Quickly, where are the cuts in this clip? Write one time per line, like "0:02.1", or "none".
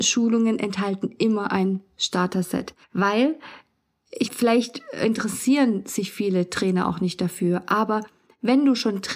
0:02.8
0:04.3